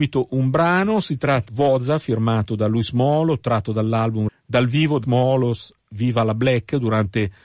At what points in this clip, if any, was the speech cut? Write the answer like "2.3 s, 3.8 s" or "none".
1.5 s, 4.3 s, 5.0 s